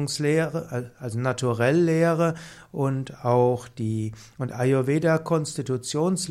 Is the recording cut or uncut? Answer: uncut